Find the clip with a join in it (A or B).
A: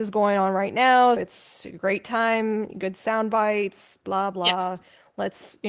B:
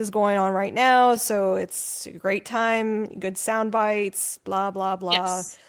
A